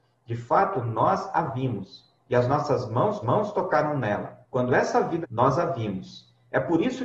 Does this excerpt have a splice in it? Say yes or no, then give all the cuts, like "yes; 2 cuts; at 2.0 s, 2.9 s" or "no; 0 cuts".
yes; 3 cuts; at 3.2 s, 4.4 s, 5.2 s